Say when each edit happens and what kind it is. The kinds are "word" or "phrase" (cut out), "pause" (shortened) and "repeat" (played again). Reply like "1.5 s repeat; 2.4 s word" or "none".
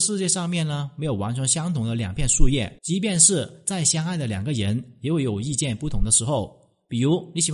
2.8 s pause